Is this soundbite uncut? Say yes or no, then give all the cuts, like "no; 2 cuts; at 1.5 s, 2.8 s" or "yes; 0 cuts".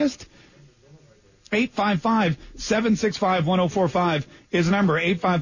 yes; 0 cuts